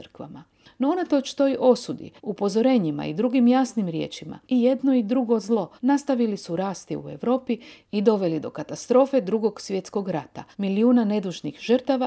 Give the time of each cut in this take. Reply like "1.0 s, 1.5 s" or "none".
2.2 s, 4.4 s, 5.8 s, 10.5 s

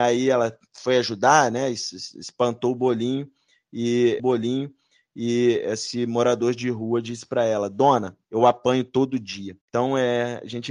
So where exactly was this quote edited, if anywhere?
4.2 s, 8.2 s, 9.6 s

